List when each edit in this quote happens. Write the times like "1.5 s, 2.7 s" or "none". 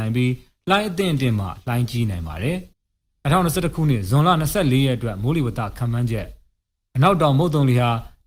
2.7 s